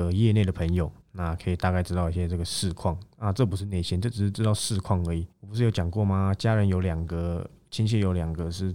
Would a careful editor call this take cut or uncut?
cut